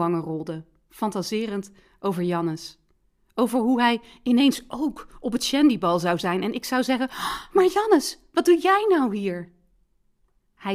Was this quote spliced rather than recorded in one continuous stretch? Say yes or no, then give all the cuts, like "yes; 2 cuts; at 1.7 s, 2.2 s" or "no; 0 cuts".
no; 0 cuts